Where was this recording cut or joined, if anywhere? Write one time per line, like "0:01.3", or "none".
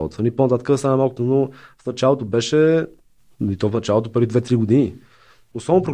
0:01.2